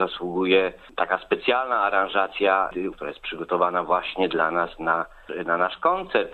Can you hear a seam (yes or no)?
yes